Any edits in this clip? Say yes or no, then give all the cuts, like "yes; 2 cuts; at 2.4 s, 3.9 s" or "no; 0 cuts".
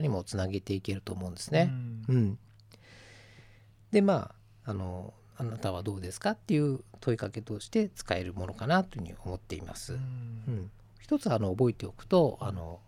no; 0 cuts